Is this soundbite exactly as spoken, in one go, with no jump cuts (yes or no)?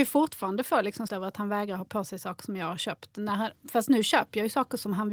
no